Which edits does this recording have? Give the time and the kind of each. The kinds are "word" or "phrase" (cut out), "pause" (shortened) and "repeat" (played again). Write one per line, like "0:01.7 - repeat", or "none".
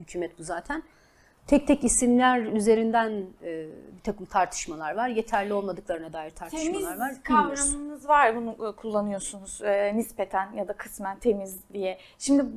none